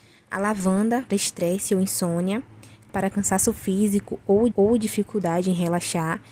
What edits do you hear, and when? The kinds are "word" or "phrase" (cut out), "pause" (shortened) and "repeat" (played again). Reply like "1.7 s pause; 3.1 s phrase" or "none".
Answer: 1.1 s word; 2.9 s word; 4.5 s repeat